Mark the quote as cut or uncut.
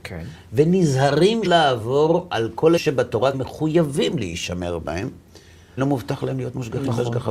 cut